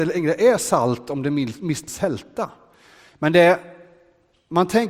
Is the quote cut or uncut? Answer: cut